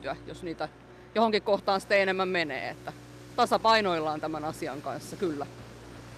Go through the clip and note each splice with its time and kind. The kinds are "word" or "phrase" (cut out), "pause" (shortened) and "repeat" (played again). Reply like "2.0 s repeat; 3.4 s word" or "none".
none